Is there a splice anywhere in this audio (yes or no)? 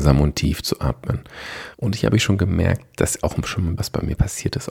yes